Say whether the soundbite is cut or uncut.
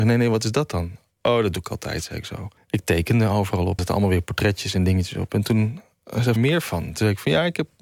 cut